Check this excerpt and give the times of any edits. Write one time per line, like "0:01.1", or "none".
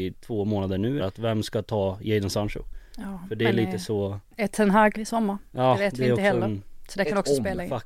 0:01.0
0:04.9